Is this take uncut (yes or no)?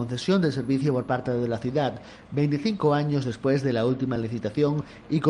yes